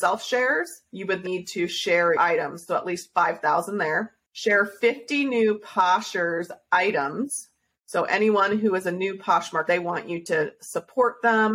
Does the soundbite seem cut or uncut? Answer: cut